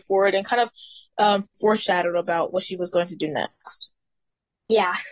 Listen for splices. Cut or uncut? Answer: uncut